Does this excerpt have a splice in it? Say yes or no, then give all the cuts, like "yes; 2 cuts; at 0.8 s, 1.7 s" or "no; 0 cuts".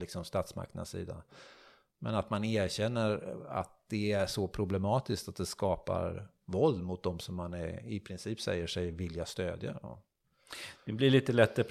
no; 0 cuts